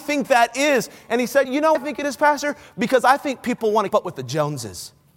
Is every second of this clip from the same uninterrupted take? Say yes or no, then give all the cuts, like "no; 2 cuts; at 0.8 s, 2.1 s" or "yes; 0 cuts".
no; 3 cuts; at 1.4 s, 1.7 s, 3.9 s